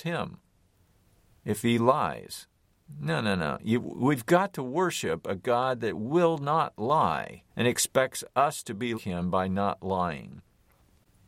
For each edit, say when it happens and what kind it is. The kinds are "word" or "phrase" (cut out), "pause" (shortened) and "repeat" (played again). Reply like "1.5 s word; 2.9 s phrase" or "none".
7.5 s pause; 8.9 s word